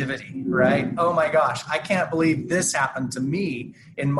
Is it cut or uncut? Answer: uncut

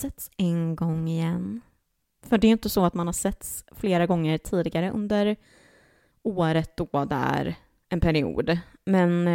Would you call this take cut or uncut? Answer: uncut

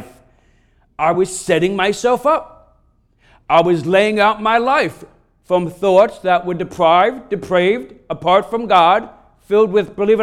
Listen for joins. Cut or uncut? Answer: uncut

